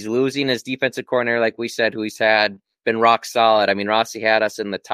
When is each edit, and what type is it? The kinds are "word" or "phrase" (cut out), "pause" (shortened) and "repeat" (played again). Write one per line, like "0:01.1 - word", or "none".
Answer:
none